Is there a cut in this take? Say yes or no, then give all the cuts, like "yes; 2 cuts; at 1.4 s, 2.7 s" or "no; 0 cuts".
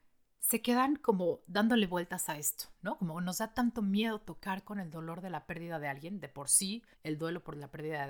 yes; 1 cut; at 6.9 s